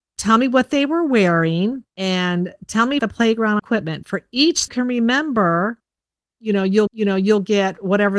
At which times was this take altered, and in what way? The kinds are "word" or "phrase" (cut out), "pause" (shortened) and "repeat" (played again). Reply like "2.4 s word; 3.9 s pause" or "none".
1.9 s pause; 3.0 s word; 4.7 s phrase; 6.9 s repeat